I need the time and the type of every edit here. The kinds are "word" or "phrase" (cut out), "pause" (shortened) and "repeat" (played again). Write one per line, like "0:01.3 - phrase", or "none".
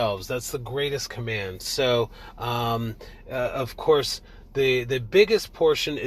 none